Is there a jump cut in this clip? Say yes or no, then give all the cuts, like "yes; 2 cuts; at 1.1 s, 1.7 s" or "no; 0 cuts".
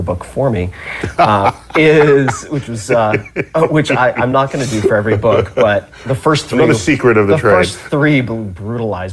no; 0 cuts